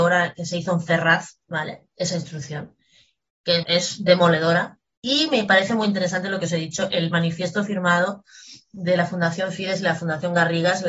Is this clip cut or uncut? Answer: cut